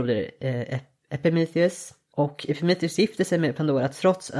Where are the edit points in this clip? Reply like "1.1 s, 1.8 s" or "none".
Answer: none